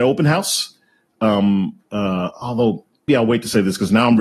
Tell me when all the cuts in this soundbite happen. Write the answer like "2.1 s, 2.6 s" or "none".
3.1 s